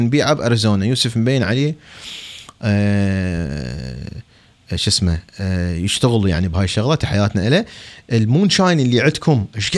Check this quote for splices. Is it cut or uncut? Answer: uncut